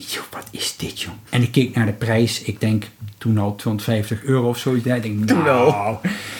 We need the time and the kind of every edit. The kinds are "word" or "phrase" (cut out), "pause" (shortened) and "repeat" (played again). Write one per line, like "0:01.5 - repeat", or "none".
0:01.3 - pause